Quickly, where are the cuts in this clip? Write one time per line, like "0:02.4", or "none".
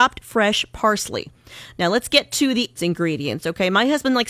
0:02.8